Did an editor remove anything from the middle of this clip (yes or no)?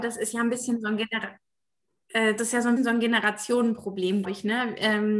yes